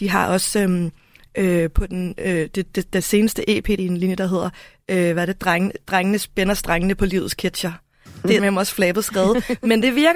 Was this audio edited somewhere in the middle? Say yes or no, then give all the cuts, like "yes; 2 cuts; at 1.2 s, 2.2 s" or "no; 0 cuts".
yes; 2 cuts; at 3.8 s, 8.4 s